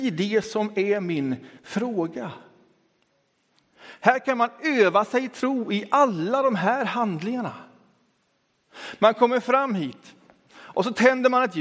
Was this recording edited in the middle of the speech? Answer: yes; 1 cut; at 1.6 s

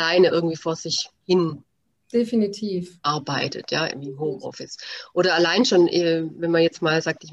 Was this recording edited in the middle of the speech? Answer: no; 0 cuts

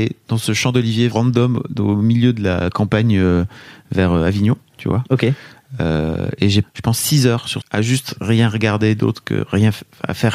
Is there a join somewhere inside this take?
yes; 3 cuts; at 1.1 s, 6.6 s, 7.6 s

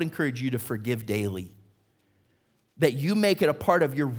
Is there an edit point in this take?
no; 0 cuts

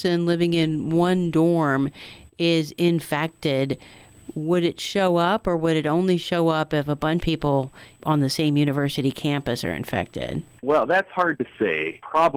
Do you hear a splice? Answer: yes; 1 cut; at 7.2 s

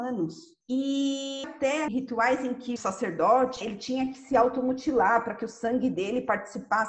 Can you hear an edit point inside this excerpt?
yes; 4 cuts; at 1.4 s, 1.9 s, 2.8 s, 3.6 s

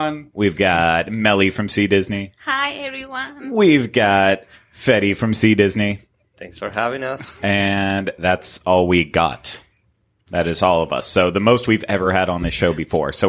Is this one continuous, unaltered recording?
yes; 0 cuts

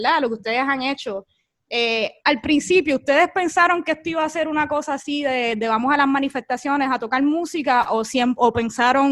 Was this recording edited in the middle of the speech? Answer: yes; 1 cut; at 2.2 s

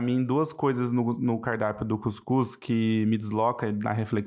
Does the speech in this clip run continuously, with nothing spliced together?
yes; 0 cuts

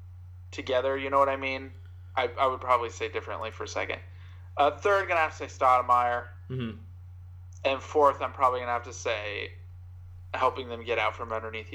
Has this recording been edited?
no; 0 cuts

